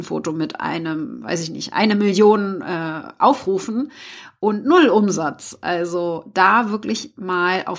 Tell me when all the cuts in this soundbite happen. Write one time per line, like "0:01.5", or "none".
none